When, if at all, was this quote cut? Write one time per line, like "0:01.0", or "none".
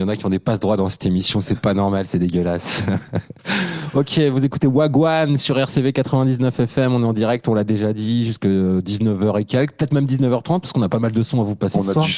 none